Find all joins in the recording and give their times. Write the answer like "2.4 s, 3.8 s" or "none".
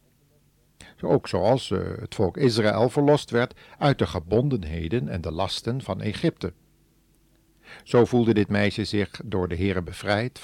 none